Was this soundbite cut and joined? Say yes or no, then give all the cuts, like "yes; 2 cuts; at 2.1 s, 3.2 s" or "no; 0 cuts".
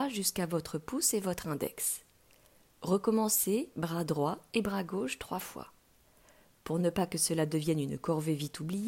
no; 0 cuts